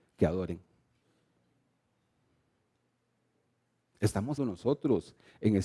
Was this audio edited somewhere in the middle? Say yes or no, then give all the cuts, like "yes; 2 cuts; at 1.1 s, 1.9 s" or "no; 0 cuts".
yes; 1 cut; at 4.4 s